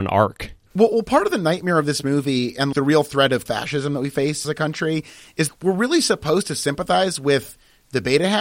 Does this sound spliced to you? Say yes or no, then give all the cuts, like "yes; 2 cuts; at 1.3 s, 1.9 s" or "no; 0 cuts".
yes; 4 cuts; at 2.7 s, 3.5 s, 4.4 s, 5.5 s